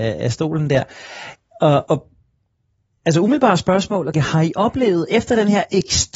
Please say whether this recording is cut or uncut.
cut